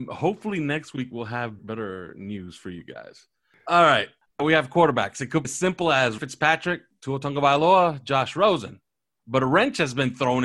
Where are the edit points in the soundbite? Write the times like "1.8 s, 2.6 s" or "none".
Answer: 1.6 s, 4.4 s, 5.4 s, 6.2 s